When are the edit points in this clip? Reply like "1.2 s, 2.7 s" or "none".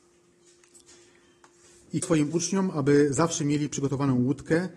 2.0 s